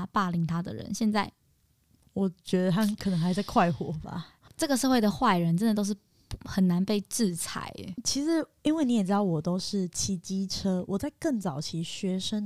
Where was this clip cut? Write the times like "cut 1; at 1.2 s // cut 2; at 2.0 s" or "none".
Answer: none